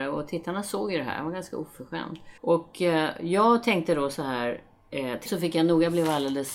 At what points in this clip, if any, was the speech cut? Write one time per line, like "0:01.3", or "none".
0:02.4
0:05.3